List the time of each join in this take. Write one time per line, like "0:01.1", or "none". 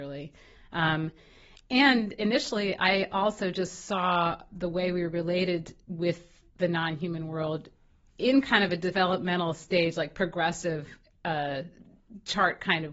none